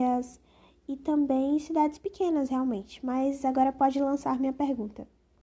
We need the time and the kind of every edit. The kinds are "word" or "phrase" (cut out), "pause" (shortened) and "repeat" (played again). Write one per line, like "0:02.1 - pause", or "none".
none